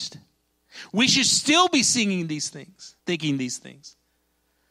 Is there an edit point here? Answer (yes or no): yes